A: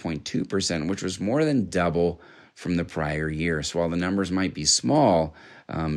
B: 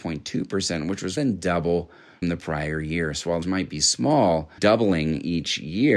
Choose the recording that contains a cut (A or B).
B